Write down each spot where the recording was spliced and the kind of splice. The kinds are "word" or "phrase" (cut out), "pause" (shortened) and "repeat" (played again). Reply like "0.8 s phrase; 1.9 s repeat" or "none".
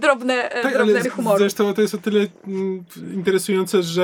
1.0 s word